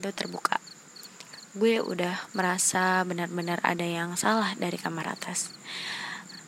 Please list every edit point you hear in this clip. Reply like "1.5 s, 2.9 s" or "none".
none

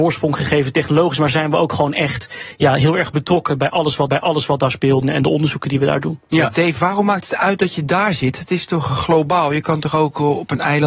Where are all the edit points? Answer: 4.1 s, 5.0 s

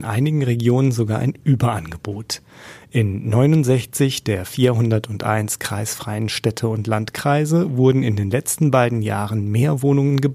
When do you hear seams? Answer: none

